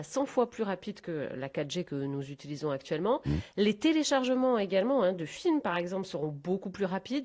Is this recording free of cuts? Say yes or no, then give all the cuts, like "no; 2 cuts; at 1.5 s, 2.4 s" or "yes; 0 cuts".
yes; 0 cuts